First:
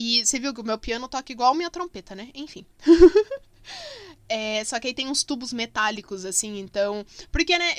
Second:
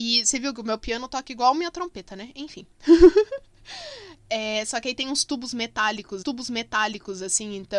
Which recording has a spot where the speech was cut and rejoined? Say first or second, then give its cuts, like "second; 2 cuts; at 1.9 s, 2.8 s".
second; 1 cut; at 6.2 s